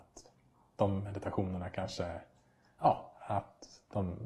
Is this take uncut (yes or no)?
yes